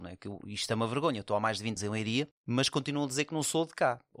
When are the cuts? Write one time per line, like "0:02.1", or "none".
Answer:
0:01.8

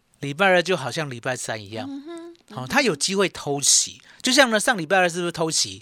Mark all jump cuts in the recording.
none

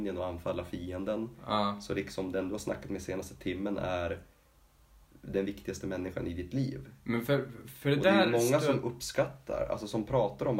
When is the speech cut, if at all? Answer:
none

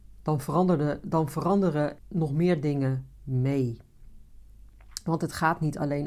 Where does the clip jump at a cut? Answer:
0:02.0

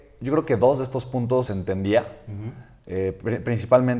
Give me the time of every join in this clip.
0:01.5

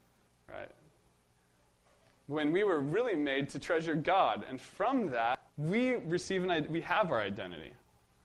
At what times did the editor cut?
0:05.5

